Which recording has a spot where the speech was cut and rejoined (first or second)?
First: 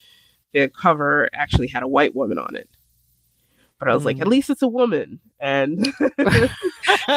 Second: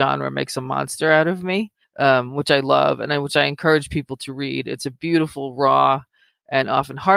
second